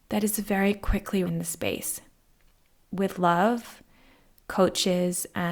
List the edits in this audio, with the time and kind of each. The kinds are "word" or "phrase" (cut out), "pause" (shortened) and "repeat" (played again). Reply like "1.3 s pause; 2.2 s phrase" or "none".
1.3 s word